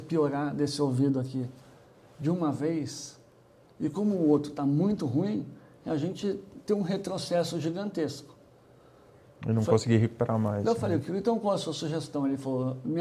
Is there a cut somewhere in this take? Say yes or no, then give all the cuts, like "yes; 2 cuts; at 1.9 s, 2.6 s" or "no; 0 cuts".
no; 0 cuts